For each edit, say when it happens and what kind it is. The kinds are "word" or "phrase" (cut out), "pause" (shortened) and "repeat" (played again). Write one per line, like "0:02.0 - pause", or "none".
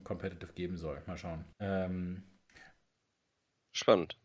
0:01.5 - pause